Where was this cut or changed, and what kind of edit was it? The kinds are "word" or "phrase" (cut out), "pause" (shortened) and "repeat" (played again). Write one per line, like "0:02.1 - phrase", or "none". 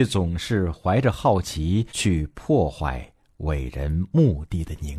0:01.9 - pause